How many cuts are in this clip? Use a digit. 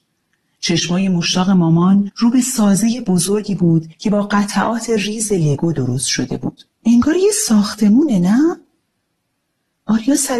1